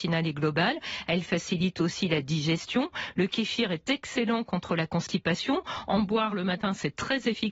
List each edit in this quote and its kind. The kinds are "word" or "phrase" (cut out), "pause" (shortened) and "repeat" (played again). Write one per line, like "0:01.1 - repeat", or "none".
0:06.3 - phrase